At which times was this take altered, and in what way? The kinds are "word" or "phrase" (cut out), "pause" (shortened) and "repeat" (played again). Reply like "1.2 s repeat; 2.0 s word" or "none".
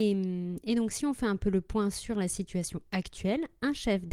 none